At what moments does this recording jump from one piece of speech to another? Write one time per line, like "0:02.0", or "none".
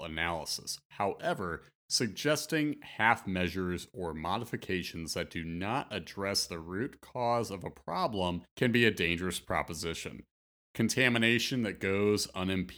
none